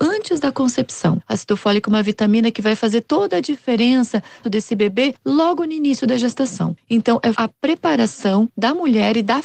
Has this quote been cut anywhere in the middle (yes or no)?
yes